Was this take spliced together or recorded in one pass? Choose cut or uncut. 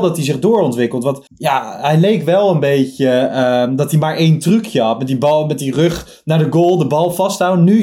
cut